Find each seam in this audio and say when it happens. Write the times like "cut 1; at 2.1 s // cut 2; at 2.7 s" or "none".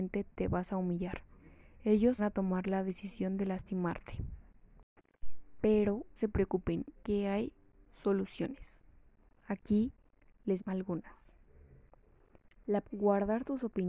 cut 1; at 2.2 s // cut 2; at 6.2 s // cut 3; at 7.0 s // cut 4; at 10.6 s // cut 5; at 12.8 s